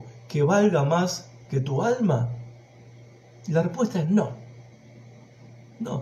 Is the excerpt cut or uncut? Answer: uncut